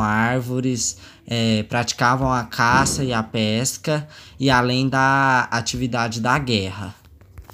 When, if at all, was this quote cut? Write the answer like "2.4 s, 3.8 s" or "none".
none